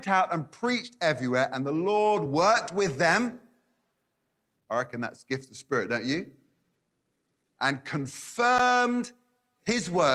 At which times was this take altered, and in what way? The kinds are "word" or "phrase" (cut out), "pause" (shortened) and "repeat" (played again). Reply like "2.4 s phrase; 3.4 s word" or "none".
none